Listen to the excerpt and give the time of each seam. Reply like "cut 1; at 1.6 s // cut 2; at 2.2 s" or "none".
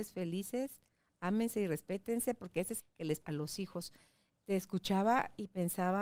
cut 1; at 2.8 s // cut 2; at 3.2 s